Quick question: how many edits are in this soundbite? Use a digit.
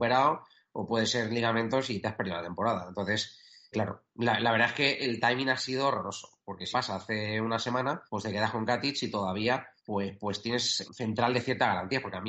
5